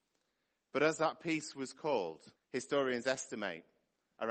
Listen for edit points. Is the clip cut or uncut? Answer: cut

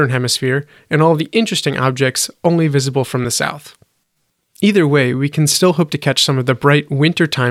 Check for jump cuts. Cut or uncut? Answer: uncut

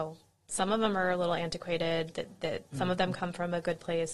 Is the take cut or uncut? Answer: uncut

